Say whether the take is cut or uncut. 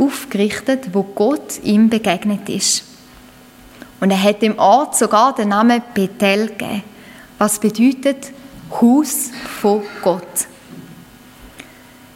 uncut